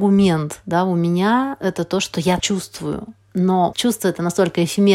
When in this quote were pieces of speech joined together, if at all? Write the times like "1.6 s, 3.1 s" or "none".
2.4 s, 3.7 s

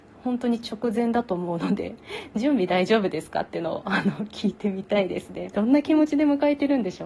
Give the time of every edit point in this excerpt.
5.5 s

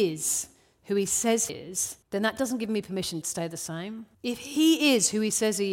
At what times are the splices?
1.5 s, 2.0 s, 3.2 s, 4.1 s

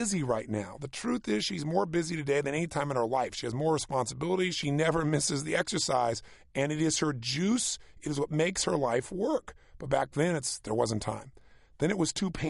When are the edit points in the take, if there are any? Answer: none

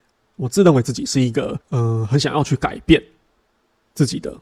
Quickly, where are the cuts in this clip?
1.6 s

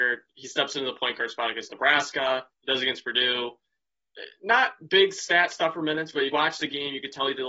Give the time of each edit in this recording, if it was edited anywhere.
2.5 s, 6.3 s

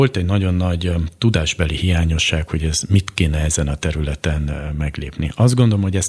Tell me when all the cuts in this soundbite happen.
none

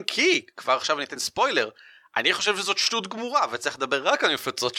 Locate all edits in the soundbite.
none

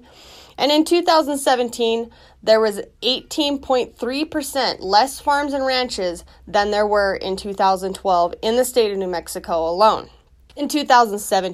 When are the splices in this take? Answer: none

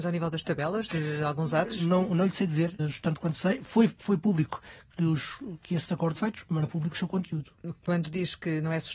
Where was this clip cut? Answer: 2.8 s, 6.1 s, 6.6 s

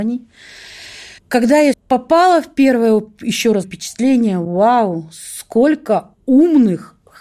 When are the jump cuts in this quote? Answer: 1.2 s, 1.7 s, 3.6 s, 6.1 s

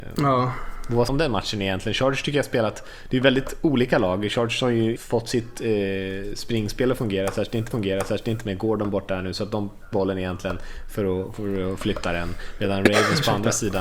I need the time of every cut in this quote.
1.1 s, 5.0 s, 7.7 s, 9.9 s

